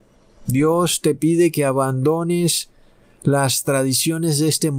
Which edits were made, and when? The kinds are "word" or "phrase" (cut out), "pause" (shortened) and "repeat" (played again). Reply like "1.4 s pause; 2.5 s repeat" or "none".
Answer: none